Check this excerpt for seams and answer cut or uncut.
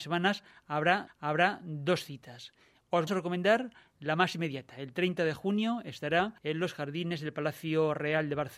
cut